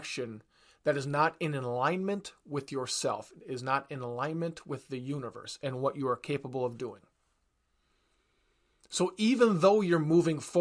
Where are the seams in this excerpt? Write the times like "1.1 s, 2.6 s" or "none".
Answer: none